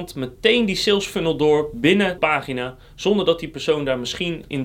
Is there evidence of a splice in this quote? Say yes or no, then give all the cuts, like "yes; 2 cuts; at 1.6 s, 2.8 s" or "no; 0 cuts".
yes; 1 cut; at 2.2 s